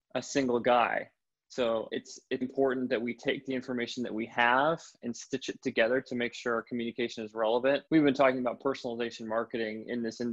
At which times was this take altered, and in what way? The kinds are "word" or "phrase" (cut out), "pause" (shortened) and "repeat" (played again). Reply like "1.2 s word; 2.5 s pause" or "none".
1.9 s word; 2.4 s word; 7.9 s pause